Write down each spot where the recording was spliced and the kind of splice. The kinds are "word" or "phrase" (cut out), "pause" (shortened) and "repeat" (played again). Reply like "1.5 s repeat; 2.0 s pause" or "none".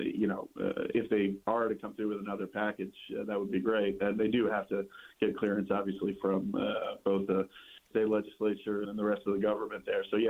0.9 s word; 1.4 s pause; 5.1 s pause; 7.9 s word; 8.8 s word